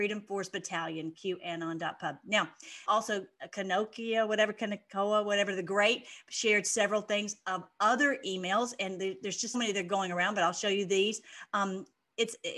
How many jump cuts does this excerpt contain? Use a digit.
2